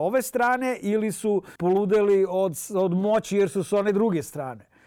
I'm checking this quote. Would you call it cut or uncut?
cut